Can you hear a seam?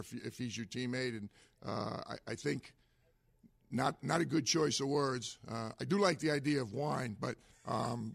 no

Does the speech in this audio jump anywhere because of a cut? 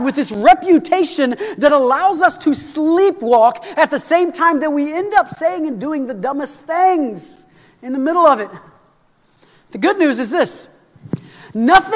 no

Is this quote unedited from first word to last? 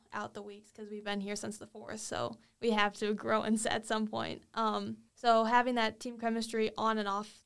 no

